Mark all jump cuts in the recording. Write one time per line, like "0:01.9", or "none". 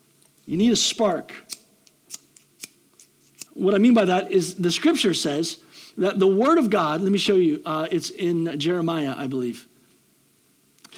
0:03.5